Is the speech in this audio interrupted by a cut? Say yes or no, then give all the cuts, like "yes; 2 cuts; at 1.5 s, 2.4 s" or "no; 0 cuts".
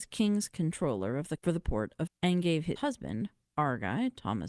yes; 3 cuts; at 1.4 s, 2.1 s, 2.8 s